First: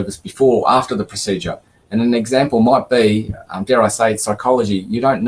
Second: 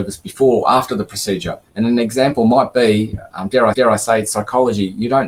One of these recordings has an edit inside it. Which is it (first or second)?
second